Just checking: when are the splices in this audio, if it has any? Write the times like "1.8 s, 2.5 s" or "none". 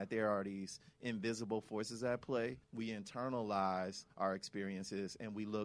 2.6 s, 4.1 s